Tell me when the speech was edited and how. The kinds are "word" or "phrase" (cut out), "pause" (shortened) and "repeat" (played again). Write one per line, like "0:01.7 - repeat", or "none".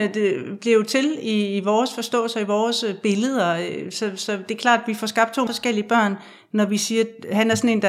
0:05.5 - word